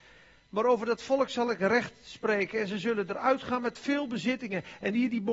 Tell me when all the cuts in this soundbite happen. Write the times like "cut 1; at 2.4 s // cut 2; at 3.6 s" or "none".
none